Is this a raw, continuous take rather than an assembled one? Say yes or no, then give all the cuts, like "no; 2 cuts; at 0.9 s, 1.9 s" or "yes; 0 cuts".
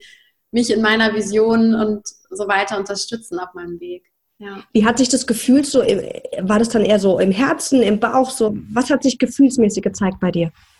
yes; 0 cuts